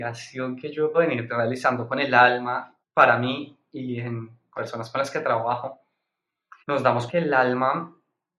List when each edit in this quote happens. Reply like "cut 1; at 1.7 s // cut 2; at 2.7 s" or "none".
cut 1; at 0.9 s // cut 2; at 2.8 s // cut 3; at 4.6 s // cut 4; at 6.6 s // cut 5; at 7.1 s